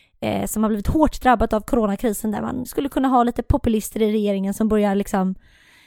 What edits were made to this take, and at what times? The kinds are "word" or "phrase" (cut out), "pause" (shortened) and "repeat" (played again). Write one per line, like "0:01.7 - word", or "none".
none